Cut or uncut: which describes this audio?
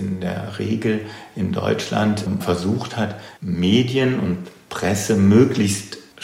cut